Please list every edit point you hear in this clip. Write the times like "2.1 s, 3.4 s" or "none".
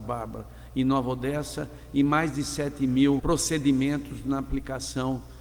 3.2 s